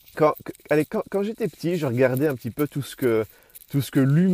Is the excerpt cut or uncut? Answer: uncut